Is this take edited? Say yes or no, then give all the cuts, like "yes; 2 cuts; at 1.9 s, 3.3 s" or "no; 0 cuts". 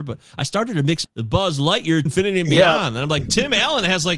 yes; 2 cuts; at 1.0 s, 2.1 s